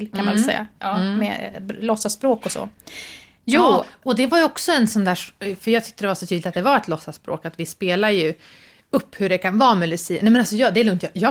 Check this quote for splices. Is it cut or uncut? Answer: uncut